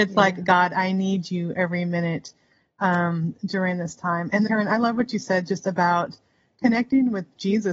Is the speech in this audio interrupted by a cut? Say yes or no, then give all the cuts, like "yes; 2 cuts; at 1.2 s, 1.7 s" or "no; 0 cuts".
yes; 1 cut; at 4.5 s